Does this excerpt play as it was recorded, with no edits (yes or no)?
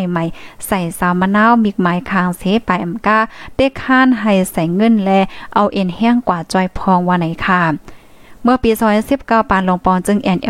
yes